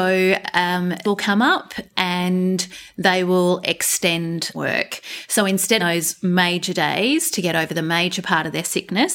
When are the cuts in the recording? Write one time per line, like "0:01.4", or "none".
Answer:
0:01.0
0:04.5
0:05.8